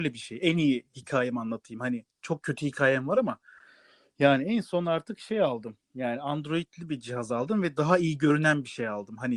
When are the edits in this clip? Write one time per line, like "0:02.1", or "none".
none